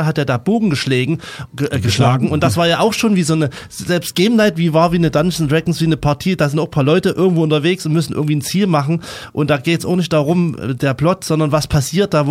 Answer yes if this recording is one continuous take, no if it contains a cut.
yes